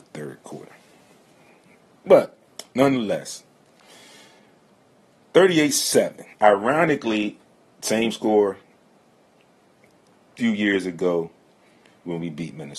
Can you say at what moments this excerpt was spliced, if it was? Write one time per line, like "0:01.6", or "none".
0:06.3

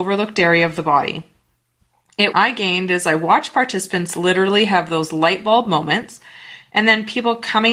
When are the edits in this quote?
0:02.3

